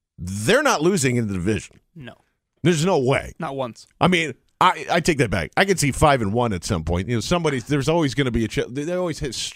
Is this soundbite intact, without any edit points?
yes; 0 cuts

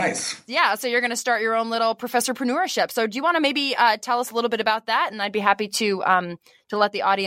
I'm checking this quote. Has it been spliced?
no; 0 cuts

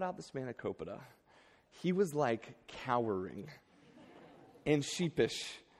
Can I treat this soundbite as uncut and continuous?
yes; 0 cuts

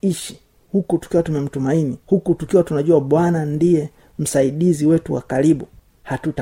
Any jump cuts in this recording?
yes; 1 cut; at 2.0 s

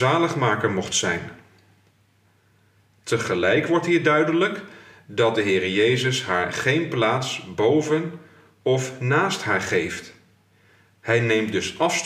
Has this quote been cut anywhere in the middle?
no; 0 cuts

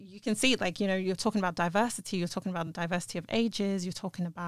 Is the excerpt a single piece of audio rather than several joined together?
yes; 0 cuts

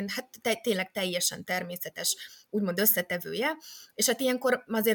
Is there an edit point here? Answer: no; 0 cuts

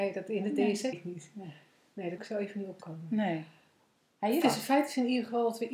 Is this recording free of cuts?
no; 3 cuts; at 0.9 s, 2.2 s, 4.4 s

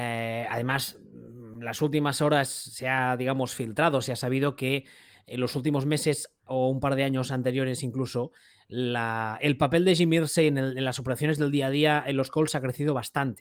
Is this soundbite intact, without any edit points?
yes; 0 cuts

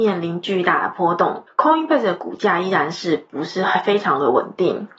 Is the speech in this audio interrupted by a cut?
yes; 1 cut; at 1.5 s

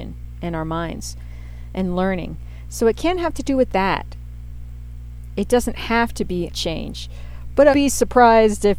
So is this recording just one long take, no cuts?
no; 2 cuts; at 6.5 s, 7.7 s

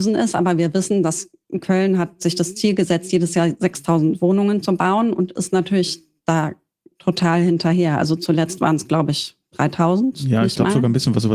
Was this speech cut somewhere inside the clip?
no; 0 cuts

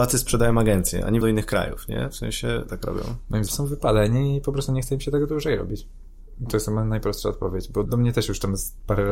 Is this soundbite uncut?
no; 4 cuts; at 1.2 s, 2.7 s, 3.5 s, 7.8 s

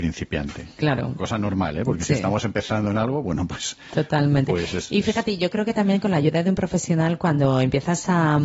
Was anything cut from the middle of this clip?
no; 0 cuts

